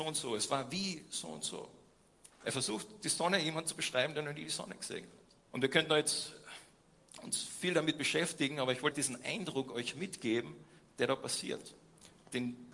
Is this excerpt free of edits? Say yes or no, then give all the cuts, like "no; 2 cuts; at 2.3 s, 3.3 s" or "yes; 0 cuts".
no; 2 cuts; at 5.4 s, 8.9 s